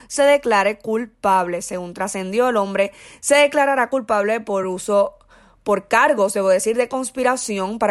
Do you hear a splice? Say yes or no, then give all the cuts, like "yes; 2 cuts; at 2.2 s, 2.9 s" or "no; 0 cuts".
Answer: no; 0 cuts